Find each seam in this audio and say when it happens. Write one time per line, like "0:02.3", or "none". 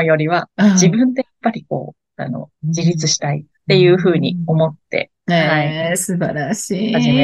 0:02.5
0:03.6